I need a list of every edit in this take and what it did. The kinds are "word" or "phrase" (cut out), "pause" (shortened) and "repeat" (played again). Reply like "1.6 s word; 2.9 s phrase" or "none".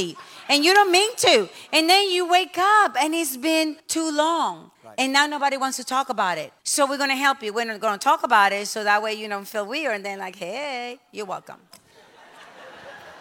3.8 s pause; 4.8 s pause; 6.6 s pause